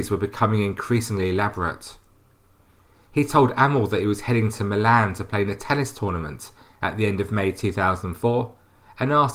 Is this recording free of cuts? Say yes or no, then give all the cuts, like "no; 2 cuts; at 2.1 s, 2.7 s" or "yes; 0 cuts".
yes; 0 cuts